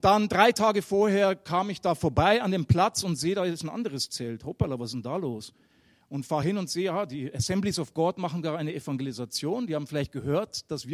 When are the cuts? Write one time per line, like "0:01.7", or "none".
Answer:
none